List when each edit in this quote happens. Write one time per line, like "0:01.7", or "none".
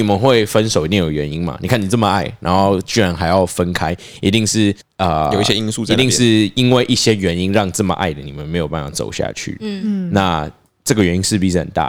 0:04.8